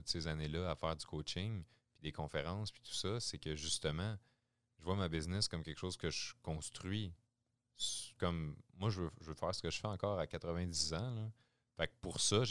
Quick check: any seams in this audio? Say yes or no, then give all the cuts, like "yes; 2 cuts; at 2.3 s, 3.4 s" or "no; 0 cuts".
no; 0 cuts